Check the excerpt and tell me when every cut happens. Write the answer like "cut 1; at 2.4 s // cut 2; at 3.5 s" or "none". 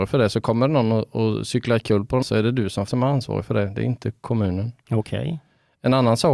cut 1; at 2.2 s // cut 2; at 2.9 s